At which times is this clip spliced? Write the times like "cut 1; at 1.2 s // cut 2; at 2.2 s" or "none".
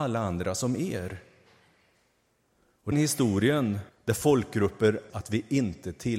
cut 1; at 2.9 s // cut 2; at 3.9 s // cut 3; at 5.1 s